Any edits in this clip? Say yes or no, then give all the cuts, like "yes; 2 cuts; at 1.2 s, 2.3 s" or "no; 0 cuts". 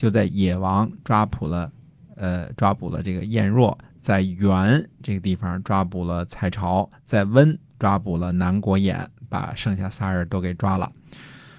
no; 0 cuts